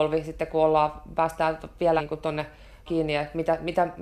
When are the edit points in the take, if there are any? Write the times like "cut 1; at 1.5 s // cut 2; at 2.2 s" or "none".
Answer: cut 1; at 2.0 s // cut 2; at 2.9 s